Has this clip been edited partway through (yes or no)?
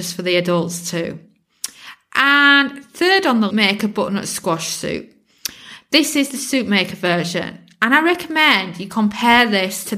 yes